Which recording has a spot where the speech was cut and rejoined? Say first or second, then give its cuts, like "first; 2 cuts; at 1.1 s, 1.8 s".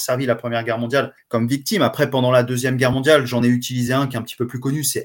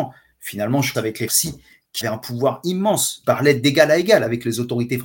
second; 4 cuts; at 0.9 s, 1.3 s, 2.0 s, 3.2 s